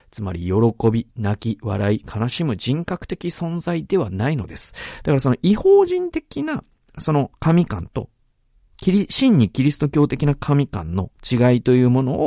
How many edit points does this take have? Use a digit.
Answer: 0